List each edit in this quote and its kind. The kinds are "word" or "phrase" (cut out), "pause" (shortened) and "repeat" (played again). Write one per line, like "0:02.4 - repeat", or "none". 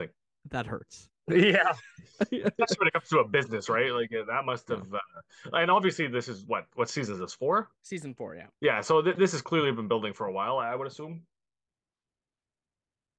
0:07.8 - pause
0:08.5 - pause